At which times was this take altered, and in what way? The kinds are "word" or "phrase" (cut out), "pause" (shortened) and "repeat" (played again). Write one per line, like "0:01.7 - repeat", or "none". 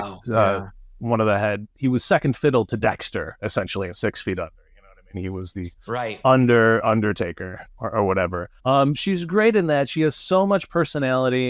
0:08.6 - pause